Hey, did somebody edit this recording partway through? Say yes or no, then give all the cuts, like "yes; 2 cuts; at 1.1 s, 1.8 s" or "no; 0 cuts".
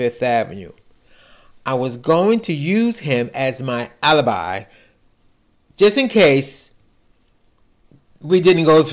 no; 0 cuts